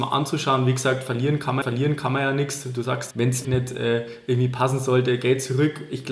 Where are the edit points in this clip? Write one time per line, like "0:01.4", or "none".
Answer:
0:01.6
0:03.1
0:03.4